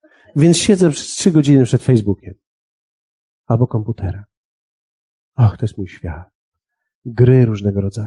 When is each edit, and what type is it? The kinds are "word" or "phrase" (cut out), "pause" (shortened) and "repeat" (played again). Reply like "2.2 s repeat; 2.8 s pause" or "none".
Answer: none